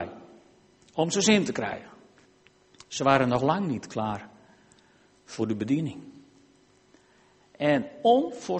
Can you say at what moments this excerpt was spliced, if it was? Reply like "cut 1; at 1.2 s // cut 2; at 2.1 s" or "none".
none